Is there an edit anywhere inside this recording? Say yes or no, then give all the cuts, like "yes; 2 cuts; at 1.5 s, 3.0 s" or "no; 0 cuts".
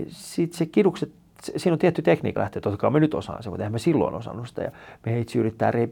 yes; 1 cut; at 2.4 s